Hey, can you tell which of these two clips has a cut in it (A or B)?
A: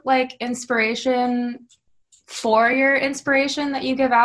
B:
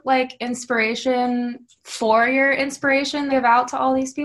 B